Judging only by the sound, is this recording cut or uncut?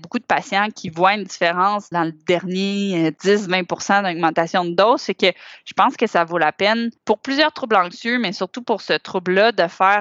cut